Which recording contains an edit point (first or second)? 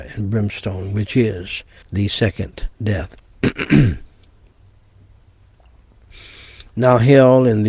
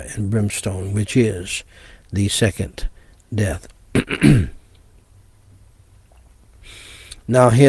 first